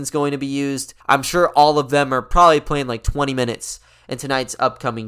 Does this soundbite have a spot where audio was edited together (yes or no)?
yes